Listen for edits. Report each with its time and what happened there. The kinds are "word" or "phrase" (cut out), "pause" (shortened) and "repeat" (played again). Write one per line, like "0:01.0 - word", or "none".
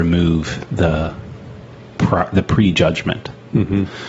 0:01.9 - word